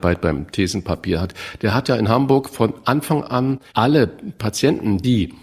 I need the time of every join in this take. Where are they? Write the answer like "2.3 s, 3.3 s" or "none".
3.7 s